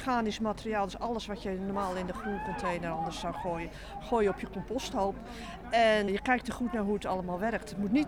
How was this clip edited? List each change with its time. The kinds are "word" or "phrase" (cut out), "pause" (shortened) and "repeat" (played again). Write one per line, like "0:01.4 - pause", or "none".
0:06.1 - word